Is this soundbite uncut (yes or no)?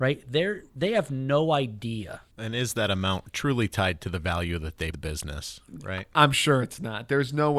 no